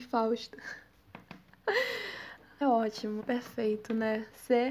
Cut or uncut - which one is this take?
cut